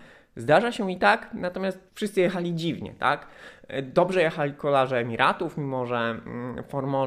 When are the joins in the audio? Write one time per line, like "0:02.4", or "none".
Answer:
0:01.9